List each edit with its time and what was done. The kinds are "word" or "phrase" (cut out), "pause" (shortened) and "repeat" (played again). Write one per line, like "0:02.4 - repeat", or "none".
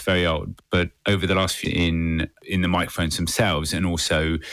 0:01.6 - phrase

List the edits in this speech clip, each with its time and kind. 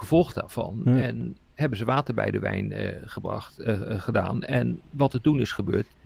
none

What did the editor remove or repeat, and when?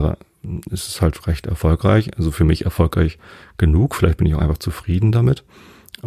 none

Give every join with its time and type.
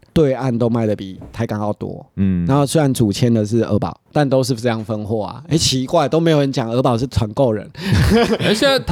0:04.1 - pause

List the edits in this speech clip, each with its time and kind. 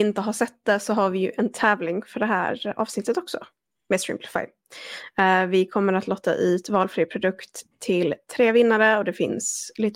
none

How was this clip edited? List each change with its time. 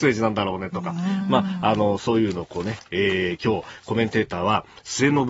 none

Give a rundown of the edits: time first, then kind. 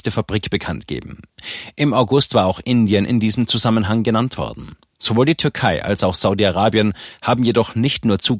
none

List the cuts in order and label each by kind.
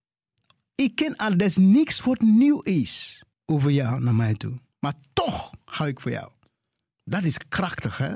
0:03.3 - pause

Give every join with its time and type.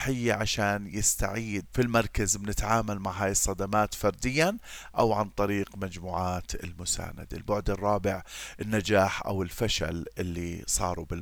0:01.7 - word

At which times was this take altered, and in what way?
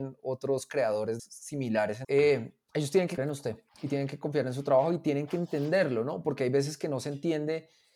0:01.2 - phrase
0:02.0 - phrase
0:03.2 - word
0:03.7 - pause

